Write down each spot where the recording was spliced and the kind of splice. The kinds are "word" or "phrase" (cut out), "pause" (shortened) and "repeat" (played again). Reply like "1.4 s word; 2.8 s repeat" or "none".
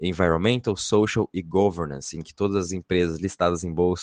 none